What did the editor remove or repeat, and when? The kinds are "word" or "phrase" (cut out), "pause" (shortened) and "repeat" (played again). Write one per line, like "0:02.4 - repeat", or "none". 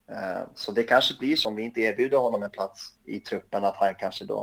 0:02.9 - pause